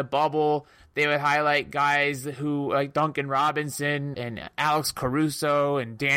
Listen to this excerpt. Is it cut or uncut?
cut